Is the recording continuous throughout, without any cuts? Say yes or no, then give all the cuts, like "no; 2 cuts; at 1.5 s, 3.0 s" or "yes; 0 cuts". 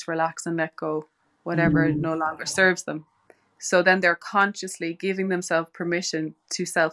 yes; 0 cuts